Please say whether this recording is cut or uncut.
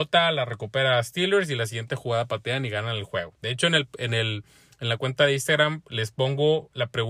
uncut